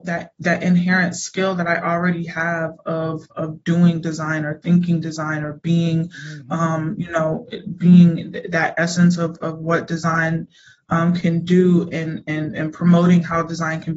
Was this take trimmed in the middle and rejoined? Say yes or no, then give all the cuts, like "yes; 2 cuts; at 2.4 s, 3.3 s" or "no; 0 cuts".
no; 0 cuts